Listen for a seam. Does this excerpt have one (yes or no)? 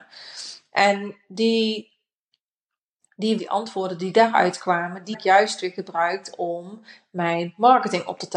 yes